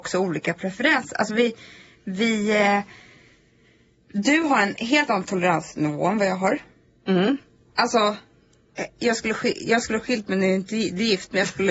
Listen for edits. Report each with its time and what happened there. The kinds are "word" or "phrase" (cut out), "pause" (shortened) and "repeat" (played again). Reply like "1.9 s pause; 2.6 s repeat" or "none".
none

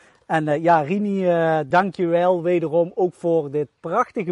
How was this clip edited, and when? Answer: none

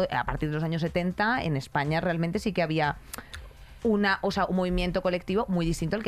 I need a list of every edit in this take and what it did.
none

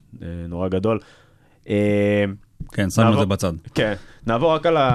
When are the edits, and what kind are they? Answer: none

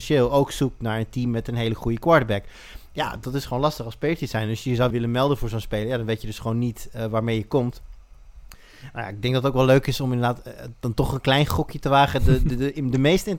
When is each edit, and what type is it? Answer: 4.9 s word

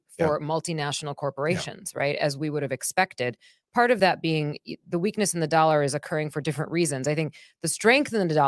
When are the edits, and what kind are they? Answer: none

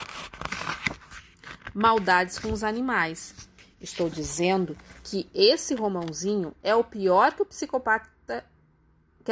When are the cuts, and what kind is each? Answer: none

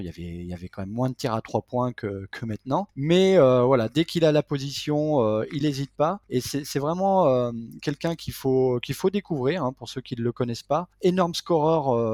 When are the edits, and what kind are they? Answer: none

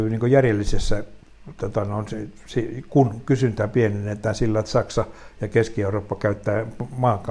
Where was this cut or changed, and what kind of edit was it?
none

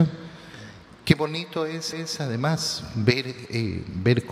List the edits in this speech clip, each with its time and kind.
1.9 s repeat

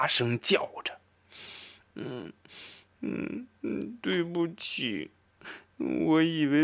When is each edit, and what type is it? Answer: none

